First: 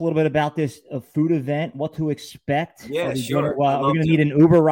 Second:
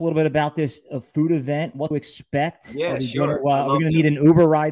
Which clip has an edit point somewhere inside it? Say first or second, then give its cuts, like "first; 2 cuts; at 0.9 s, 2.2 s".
second; 1 cut; at 1.9 s